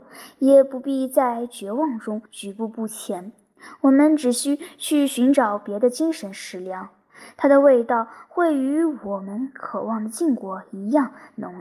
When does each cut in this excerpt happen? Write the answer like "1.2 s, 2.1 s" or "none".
2.3 s